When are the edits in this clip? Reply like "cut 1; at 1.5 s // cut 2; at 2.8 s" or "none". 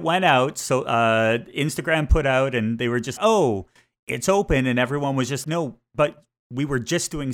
cut 1; at 3.2 s // cut 2; at 5.4 s

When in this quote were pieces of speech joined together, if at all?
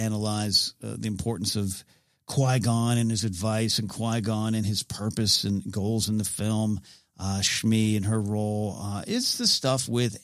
none

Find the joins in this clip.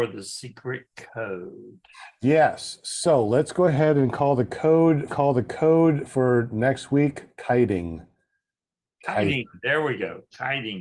cut 1; at 5.1 s

